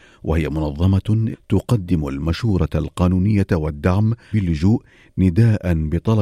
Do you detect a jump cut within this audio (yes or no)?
yes